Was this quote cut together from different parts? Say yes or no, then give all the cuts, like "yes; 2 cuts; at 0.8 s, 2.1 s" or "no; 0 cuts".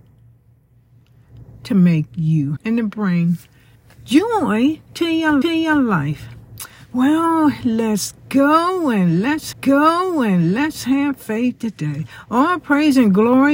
yes; 4 cuts; at 2.6 s, 3.7 s, 5.4 s, 9.5 s